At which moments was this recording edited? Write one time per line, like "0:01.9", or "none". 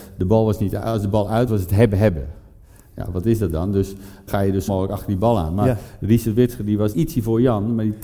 0:01.5
0:04.3
0:04.7
0:06.9